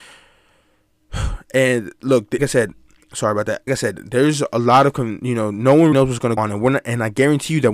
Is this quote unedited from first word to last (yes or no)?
no